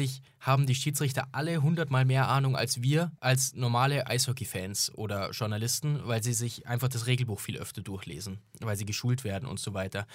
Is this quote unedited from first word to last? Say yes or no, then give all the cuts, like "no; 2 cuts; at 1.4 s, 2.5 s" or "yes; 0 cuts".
no; 1 cut; at 3.2 s